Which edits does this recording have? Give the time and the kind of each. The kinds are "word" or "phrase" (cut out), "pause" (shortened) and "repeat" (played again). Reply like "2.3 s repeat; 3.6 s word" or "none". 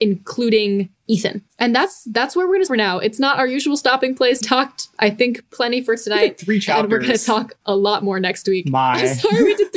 1.5 s pause; 2.7 s word; 4.4 s phrase